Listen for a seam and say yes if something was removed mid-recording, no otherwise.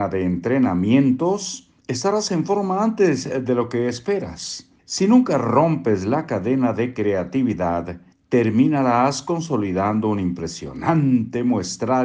yes